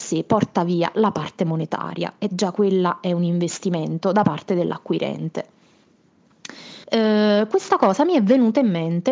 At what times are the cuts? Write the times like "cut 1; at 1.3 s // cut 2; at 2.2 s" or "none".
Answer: cut 1; at 6.8 s